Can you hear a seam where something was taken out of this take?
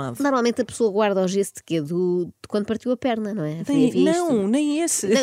no; 0 cuts

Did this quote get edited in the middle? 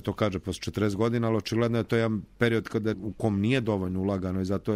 yes; 1 cut; at 2.9 s

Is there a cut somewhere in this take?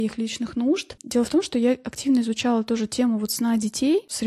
no; 0 cuts

